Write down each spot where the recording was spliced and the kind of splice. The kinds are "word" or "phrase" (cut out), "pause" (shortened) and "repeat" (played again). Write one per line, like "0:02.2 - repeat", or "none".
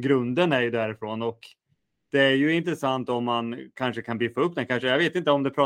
none